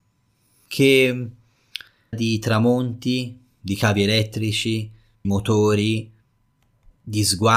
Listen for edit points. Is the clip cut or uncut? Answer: cut